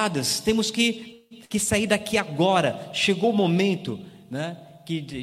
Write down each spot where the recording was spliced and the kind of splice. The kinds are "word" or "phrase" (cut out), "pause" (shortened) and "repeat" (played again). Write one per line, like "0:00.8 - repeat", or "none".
none